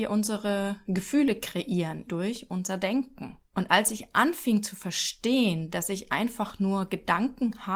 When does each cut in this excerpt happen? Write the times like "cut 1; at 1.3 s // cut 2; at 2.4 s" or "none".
cut 1; at 2.1 s // cut 2; at 3.5 s